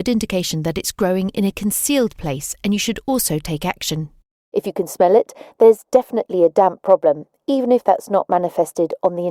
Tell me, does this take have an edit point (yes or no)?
no